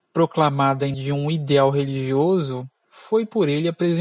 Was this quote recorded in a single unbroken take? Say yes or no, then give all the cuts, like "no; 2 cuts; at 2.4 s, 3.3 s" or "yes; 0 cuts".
no; 1 cut; at 0.9 s